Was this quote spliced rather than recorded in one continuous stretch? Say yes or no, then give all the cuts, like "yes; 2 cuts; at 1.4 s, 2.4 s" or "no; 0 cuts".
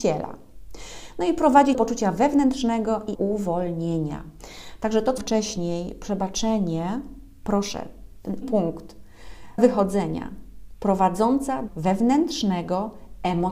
yes; 6 cuts; at 1.7 s, 3.1 s, 5.2 s, 8.4 s, 9.6 s, 11.7 s